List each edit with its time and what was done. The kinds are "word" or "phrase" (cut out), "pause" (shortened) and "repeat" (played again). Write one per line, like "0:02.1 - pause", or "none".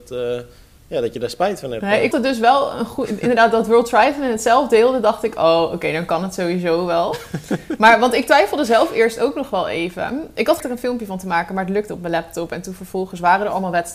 0:02.1 - word
0:10.6 - word
0:11.9 - word